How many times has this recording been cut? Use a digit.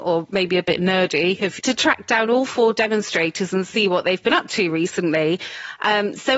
1